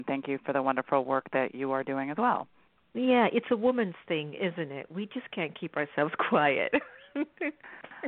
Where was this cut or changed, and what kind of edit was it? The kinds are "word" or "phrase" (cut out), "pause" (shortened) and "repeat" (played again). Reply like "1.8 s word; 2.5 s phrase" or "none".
none